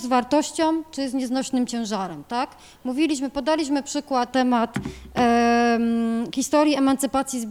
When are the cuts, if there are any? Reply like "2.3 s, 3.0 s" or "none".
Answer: 4.3 s